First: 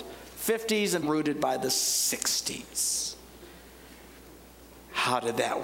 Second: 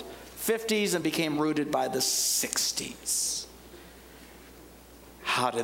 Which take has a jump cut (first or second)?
first